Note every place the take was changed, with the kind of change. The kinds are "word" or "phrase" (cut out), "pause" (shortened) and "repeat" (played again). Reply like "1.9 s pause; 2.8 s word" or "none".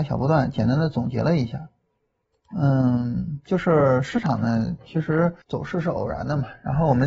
5.4 s pause